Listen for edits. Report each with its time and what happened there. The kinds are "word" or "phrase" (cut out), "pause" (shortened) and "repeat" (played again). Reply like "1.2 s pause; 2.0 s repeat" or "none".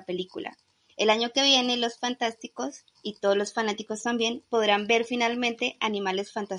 2.9 s pause